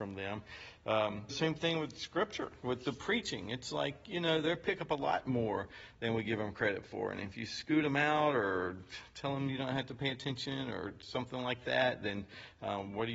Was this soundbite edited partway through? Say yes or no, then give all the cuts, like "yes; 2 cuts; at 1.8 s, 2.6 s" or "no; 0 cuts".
yes; 1 cut; at 1.3 s